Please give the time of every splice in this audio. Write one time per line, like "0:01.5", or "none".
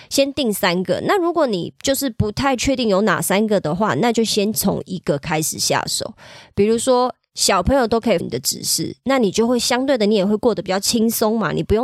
0:08.2